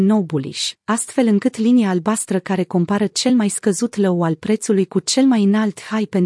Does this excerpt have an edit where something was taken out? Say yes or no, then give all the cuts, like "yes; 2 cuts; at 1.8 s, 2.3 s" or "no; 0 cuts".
no; 0 cuts